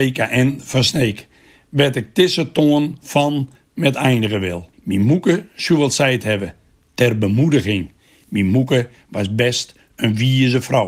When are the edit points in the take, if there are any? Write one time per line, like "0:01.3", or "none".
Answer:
0:04.7

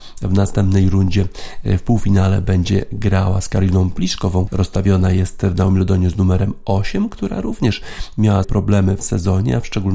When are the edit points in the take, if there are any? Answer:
0:04.5
0:08.4
0:09.0

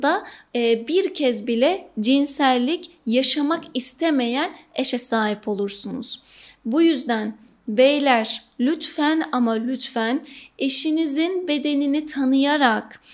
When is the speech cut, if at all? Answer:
none

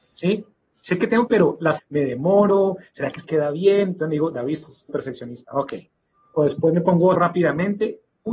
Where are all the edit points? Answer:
0:01.3
0:01.8
0:03.2
0:04.9
0:07.1

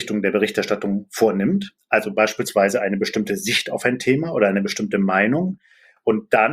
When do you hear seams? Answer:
none

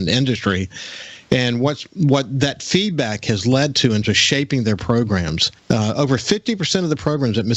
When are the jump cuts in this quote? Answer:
0:04.0
0:05.6

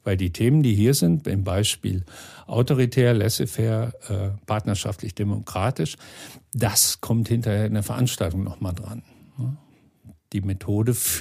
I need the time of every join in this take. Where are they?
none

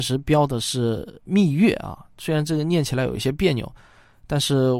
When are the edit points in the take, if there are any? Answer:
none

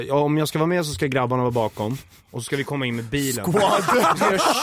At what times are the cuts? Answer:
none

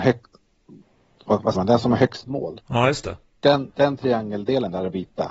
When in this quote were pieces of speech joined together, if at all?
0:01.5
0:02.2

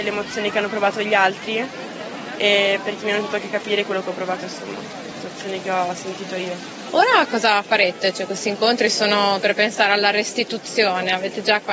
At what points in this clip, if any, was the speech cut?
0:04.4

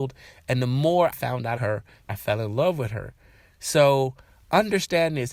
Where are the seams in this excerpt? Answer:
0:01.1
0:01.6
0:02.1

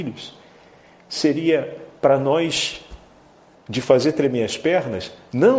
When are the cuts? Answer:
none

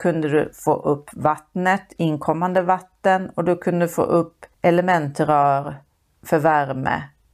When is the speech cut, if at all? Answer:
0:04.5

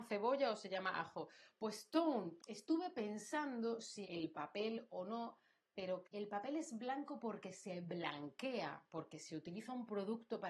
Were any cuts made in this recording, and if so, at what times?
0:02.4
0:04.0
0:06.0

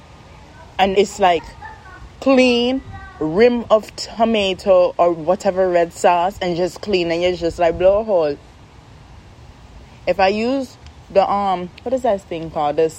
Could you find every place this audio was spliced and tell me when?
0:00.9

